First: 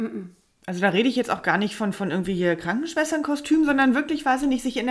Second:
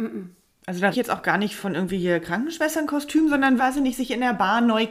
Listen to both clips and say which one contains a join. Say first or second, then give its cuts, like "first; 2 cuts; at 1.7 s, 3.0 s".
second; 3 cuts; at 0.9 s, 1.6 s, 3.6 s